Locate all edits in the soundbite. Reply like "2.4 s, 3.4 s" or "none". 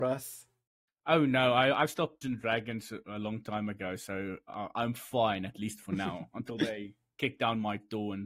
2.2 s